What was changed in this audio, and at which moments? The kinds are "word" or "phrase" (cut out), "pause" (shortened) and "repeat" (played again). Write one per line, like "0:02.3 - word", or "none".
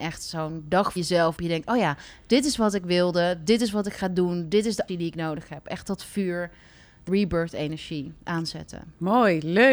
0:01.0 - word
0:01.4 - word
0:04.9 - word
0:07.1 - word